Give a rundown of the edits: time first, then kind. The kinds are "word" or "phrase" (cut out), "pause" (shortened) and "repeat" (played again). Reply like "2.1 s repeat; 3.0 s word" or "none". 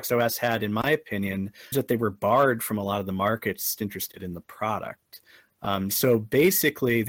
1.7 s word; 3.8 s phrase